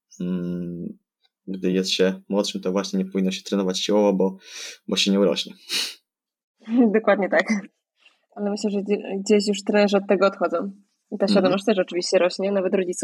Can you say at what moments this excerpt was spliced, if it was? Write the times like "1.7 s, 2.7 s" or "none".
none